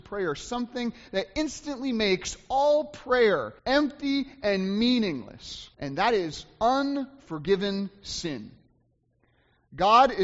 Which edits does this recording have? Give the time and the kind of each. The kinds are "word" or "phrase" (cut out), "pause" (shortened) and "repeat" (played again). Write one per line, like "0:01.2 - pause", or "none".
0:03.6 - pause
0:05.7 - pause